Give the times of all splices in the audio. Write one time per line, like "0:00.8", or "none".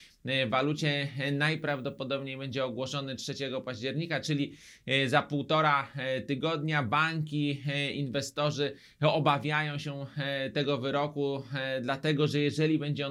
none